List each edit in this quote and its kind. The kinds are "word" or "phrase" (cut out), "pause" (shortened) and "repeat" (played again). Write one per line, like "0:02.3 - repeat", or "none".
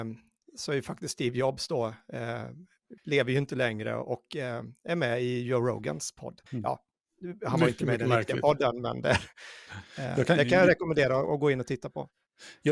0:03.0 - pause
0:06.5 - pause